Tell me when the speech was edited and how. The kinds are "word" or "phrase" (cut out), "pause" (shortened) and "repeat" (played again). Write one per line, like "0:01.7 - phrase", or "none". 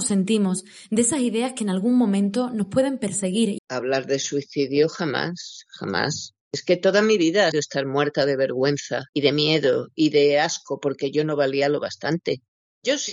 0:03.6 - word
0:06.4 - pause
0:07.5 - word